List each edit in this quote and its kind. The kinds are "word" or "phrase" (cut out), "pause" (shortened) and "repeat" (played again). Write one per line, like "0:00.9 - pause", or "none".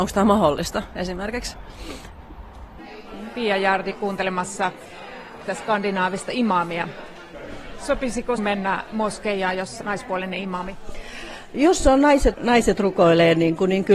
0:03.9 - word
0:05.5 - word
0:08.4 - word
0:09.8 - word
0:12.3 - word